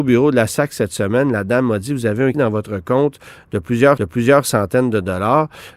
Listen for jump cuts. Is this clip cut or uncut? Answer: cut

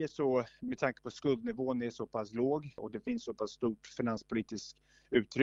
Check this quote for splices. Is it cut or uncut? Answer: uncut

